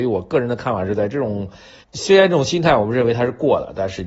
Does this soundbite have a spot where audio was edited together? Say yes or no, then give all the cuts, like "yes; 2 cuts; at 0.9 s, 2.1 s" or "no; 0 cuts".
yes; 1 cut; at 1.8 s